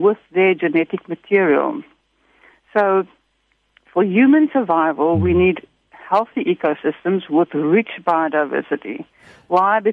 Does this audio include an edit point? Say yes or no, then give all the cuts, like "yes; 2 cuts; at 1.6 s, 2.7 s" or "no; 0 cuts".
no; 0 cuts